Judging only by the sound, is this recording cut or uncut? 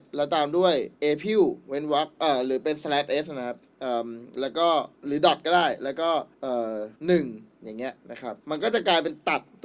cut